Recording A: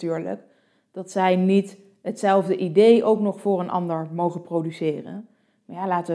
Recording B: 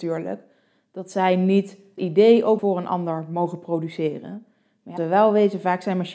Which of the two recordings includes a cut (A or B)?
B